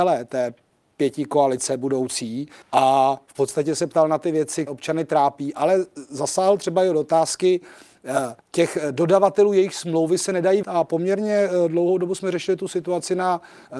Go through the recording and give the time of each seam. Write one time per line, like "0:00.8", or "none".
0:02.6
0:04.7
0:08.4
0:10.6